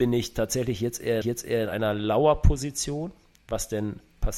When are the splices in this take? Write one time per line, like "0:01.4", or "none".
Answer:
0:01.2